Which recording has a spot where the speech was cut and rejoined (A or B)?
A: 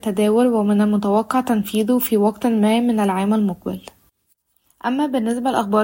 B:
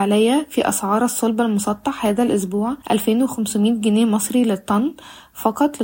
B